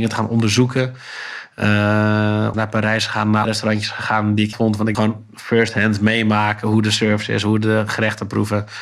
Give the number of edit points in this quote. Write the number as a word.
four